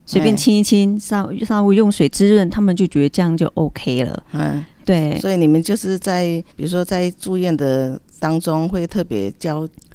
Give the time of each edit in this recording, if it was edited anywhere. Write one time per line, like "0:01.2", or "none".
0:06.5